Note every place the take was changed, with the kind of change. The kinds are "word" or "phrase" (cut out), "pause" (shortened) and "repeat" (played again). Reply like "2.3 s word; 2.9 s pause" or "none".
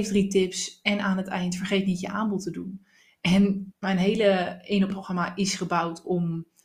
3.7 s word; 4.9 s word